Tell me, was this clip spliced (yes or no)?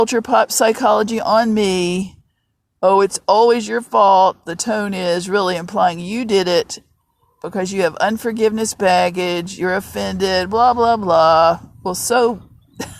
no